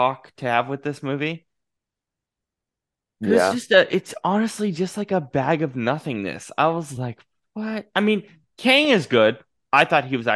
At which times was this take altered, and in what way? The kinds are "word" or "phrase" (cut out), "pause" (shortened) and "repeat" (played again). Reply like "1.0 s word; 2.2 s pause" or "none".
none